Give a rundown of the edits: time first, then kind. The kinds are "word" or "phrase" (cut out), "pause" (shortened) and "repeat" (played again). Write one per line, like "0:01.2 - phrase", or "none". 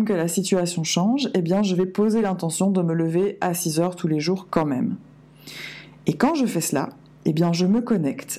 none